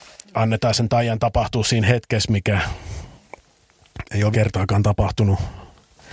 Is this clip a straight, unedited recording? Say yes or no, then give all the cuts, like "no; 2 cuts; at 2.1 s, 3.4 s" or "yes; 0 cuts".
no; 1 cut; at 4.3 s